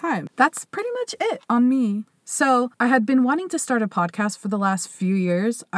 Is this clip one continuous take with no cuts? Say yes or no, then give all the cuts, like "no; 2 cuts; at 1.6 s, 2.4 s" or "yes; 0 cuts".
no; 1 cut; at 2.7 s